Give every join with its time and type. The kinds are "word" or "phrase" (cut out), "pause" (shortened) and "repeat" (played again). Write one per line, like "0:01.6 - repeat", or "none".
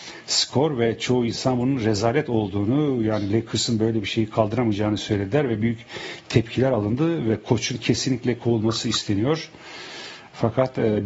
none